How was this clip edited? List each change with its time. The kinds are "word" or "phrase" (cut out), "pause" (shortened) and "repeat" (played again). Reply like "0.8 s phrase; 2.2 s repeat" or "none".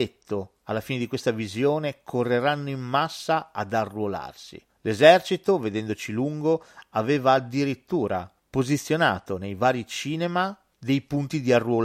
none